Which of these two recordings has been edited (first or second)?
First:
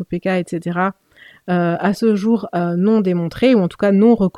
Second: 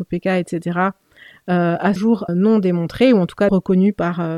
second